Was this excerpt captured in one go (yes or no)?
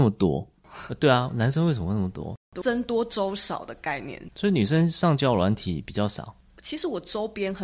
no